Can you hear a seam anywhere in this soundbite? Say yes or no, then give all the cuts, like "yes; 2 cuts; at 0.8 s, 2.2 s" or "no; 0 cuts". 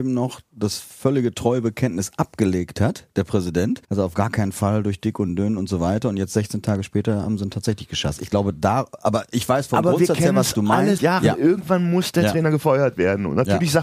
yes; 2 cuts; at 3.8 s, 11.0 s